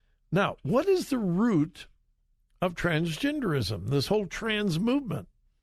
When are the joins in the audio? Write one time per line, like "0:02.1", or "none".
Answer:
0:02.2